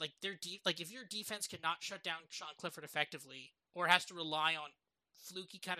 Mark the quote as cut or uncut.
uncut